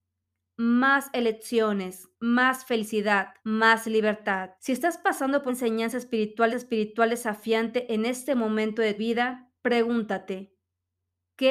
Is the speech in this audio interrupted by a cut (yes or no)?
yes